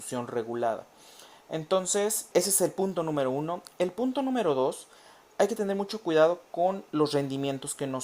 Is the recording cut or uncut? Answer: cut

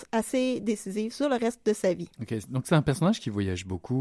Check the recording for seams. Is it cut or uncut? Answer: cut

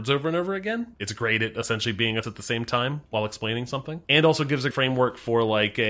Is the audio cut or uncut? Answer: cut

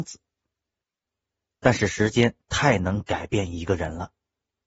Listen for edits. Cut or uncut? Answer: uncut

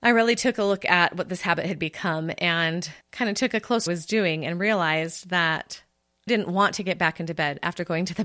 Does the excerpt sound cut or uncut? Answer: cut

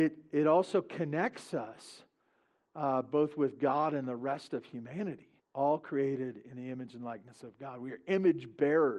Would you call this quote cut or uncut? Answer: cut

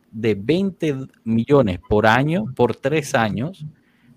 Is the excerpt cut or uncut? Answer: uncut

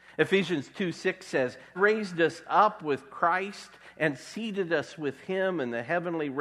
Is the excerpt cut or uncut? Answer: cut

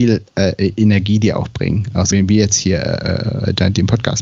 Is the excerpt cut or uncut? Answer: cut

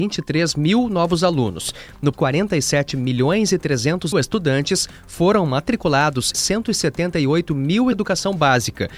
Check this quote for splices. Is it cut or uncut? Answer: cut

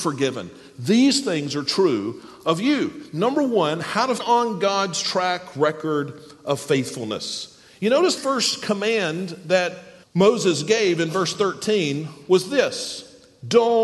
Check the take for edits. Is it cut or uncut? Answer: cut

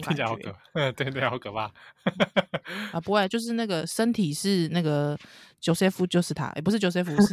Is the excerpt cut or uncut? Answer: uncut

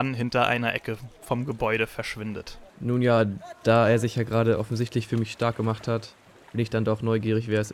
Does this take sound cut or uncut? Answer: cut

